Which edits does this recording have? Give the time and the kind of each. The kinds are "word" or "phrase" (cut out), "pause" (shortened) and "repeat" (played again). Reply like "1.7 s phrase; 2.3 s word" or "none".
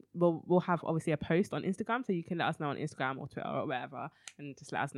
none